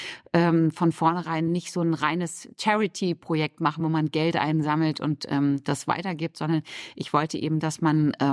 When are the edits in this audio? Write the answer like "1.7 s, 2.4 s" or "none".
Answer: none